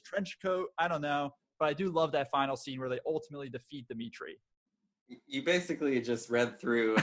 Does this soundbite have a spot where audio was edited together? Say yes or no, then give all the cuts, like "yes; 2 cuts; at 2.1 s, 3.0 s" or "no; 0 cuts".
no; 0 cuts